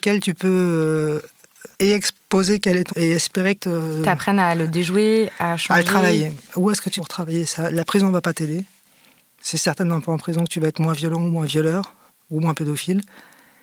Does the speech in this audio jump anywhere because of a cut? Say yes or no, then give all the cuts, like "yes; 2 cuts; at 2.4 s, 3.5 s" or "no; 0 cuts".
yes; 4 cuts; at 1.7 s, 2.9 s, 3.6 s, 7.0 s